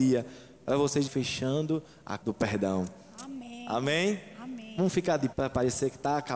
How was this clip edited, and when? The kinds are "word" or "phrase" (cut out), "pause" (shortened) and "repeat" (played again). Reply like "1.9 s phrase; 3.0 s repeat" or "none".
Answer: 1.1 s word; 2.2 s word; 5.3 s word